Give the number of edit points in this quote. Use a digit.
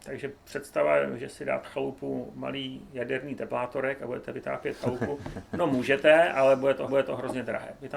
2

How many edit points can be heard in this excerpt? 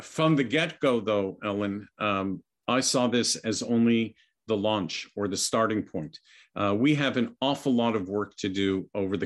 0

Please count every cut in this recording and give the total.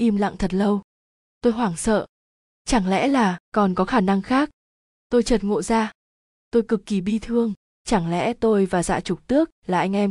1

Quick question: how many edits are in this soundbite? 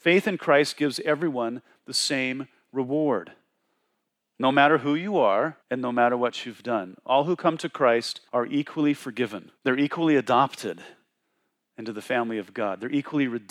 3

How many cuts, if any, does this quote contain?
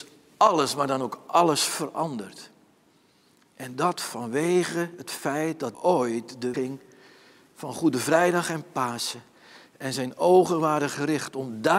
2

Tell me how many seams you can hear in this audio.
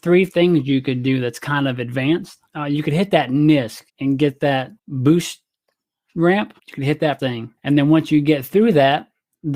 6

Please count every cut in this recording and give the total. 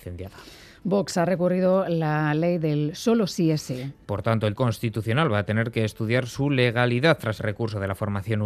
2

